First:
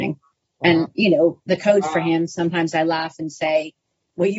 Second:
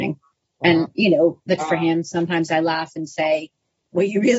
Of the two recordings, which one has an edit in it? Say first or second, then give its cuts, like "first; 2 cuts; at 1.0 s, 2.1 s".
second; 1 cut; at 1.6 s